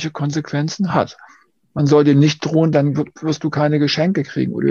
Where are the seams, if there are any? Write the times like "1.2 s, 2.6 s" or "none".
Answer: none